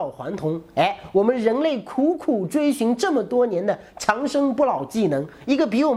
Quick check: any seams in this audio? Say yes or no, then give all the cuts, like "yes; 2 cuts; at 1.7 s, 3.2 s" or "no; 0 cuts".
no; 0 cuts